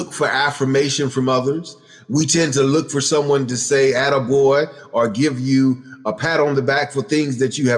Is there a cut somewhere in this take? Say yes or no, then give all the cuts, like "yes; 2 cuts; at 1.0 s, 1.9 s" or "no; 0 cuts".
no; 0 cuts